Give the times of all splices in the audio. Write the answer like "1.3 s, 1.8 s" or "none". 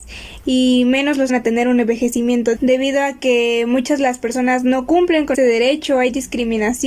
1.3 s, 2.5 s, 4.0 s, 5.3 s

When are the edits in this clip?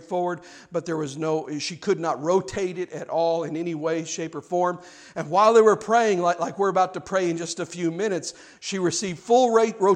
none

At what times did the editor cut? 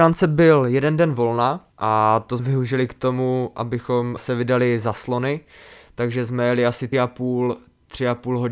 1.7 s, 2.4 s, 4.2 s, 6.9 s

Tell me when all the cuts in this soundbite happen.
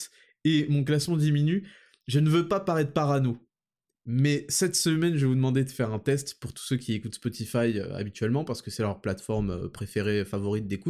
none

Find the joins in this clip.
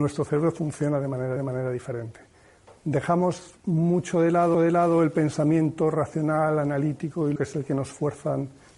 1.4 s, 3.6 s, 4.5 s, 7.4 s

